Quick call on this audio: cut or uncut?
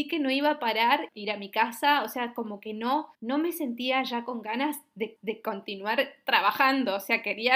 cut